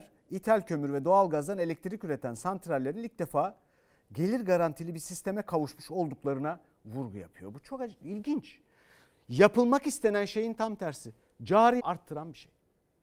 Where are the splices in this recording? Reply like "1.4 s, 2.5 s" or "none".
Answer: 11.8 s